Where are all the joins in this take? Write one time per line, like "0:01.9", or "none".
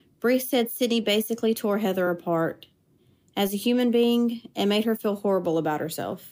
none